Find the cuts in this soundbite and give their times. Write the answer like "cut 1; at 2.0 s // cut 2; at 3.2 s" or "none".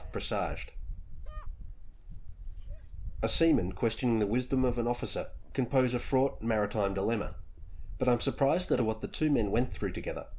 cut 1; at 8.8 s